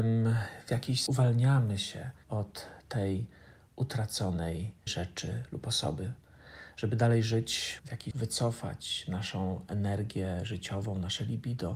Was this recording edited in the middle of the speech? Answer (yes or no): yes